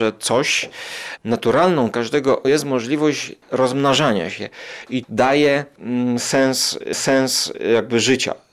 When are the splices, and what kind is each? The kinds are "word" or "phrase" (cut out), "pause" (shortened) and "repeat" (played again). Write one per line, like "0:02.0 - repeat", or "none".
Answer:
0:01.9 - word
0:02.4 - word
0:03.4 - pause
0:05.0 - word
0:06.9 - repeat